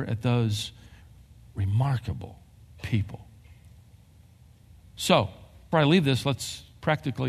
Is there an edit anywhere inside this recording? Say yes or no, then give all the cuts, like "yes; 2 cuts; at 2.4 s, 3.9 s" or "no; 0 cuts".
yes; 1 cut; at 5.7 s